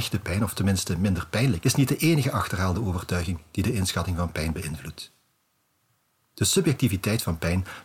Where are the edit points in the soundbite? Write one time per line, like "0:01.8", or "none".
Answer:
0:01.6